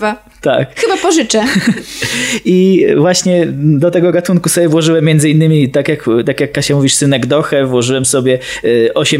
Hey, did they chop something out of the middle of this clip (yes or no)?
no